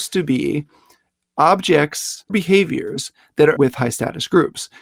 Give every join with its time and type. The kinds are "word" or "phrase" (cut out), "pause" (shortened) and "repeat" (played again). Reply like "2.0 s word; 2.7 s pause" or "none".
2.3 s word; 3.6 s word